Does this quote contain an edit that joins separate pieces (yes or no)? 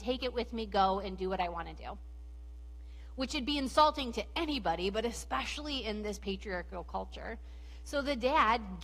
no